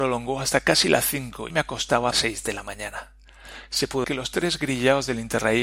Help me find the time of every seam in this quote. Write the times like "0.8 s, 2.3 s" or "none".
1.5 s, 2.1 s, 4.0 s

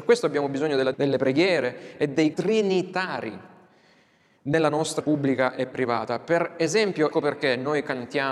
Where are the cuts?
0.9 s, 2.3 s, 5.0 s, 7.1 s

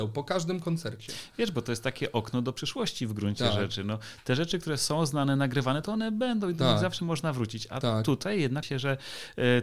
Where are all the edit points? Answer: 8.6 s

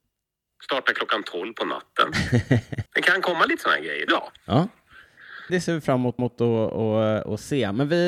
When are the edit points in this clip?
2.9 s, 4.1 s, 5.5 s, 6.2 s

